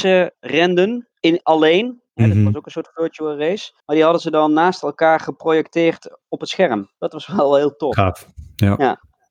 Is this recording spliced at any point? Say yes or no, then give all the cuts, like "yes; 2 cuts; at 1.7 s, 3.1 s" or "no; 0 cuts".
yes; 4 cuts; at 1.1 s, 2.1 s, 3.8 s, 7.0 s